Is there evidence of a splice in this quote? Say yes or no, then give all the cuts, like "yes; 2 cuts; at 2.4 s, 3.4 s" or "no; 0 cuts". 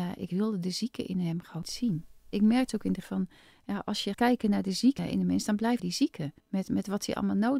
yes; 6 cuts; at 1.6 s, 3.0 s, 4.1 s, 5.0 s, 5.8 s, 6.4 s